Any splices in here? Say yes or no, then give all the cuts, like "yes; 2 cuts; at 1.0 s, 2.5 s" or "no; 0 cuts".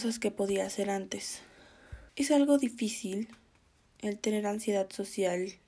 yes; 1 cut; at 2.1 s